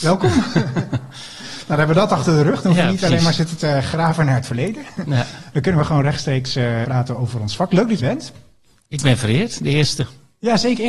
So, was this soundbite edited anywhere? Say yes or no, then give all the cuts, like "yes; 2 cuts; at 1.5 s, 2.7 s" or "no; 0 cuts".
yes; 2 cuts; at 6.8 s, 8.0 s